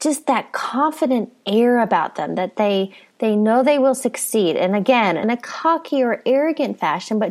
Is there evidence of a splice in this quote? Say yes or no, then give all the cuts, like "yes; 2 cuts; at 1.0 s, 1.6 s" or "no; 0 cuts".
yes; 1 cut; at 5.2 s